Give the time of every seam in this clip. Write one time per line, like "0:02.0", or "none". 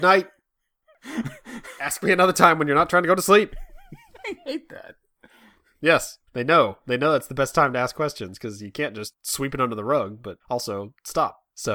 0:06.3
0:10.4

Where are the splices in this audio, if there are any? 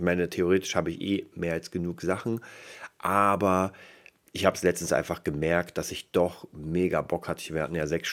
none

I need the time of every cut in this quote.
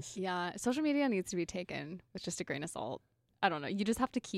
none

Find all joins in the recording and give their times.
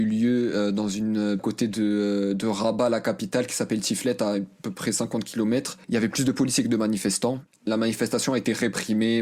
0:01.4
0:05.8
0:07.5

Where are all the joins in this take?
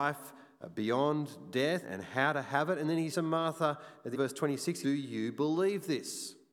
0:01.8
0:03.1
0:04.1
0:04.8

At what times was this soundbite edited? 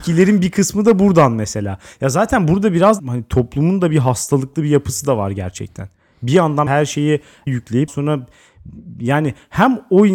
0:03.0
0:06.7
0:07.5
0:07.9

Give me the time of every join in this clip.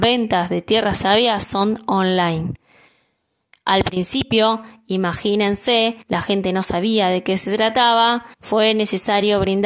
0:06.0
0:08.3

